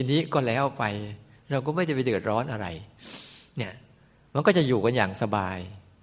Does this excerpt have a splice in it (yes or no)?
no